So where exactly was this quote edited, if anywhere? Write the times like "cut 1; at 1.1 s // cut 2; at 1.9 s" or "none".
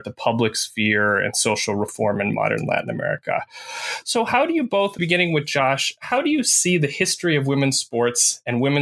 cut 1; at 5.0 s